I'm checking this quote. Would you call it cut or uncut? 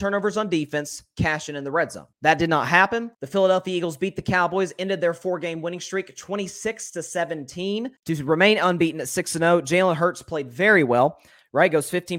cut